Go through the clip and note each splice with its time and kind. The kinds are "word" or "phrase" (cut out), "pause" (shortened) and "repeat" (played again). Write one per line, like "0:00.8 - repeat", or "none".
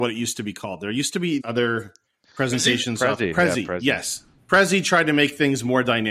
0:01.4 - word
0:04.4 - pause